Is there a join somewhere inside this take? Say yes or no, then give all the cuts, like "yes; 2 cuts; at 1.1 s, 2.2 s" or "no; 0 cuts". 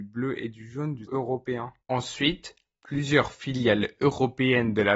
yes; 2 cuts; at 1.1 s, 1.8 s